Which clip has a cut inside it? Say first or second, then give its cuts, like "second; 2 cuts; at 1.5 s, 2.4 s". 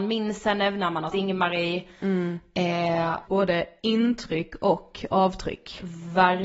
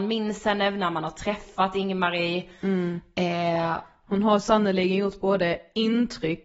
first; 2 cuts; at 1.1 s, 3.3 s